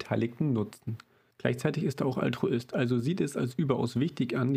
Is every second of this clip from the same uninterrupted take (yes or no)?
yes